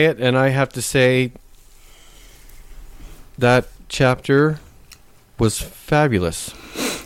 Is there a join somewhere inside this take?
no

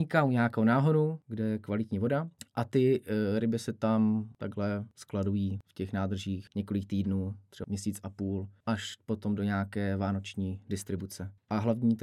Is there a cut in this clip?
yes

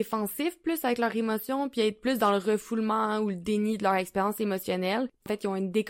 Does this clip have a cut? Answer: no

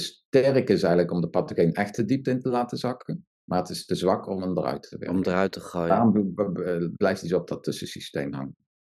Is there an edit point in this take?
yes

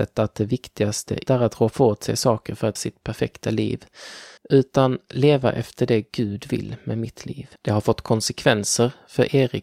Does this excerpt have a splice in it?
yes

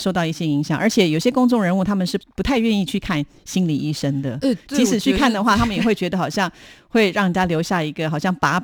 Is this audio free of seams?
yes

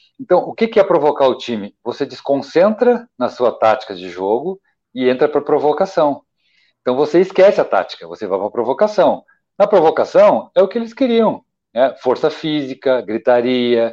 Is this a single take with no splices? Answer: yes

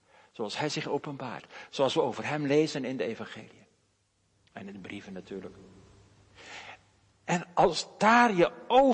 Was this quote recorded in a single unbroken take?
yes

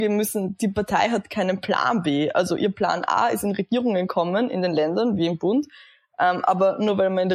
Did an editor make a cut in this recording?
no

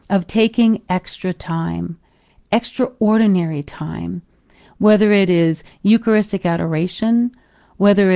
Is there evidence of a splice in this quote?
no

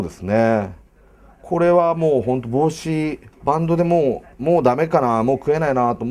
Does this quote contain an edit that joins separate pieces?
yes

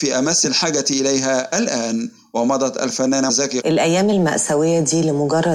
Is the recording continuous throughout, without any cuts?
no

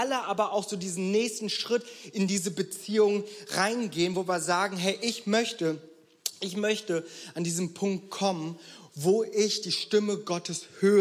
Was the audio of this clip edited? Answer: no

